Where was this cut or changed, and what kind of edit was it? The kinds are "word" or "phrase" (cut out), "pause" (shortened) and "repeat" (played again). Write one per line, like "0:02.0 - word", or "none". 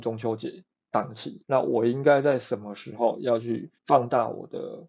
0:01.4 - pause
0:03.8 - pause